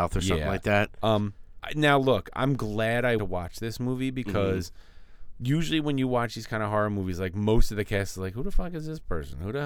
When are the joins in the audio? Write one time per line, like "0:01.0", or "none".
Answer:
0:03.2